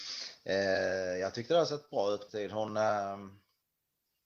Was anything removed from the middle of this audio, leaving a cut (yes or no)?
yes